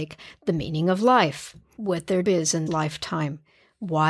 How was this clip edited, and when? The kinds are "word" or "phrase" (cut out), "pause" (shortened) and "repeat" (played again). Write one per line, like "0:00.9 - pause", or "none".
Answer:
0:01.8 - word
0:02.2 - word
0:02.7 - word